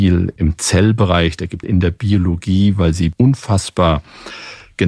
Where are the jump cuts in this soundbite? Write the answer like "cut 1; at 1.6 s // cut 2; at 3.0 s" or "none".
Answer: cut 1; at 1.6 s